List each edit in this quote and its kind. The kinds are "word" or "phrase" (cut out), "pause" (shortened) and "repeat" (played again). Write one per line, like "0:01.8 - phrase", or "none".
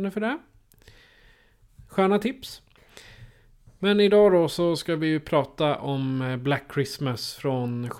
none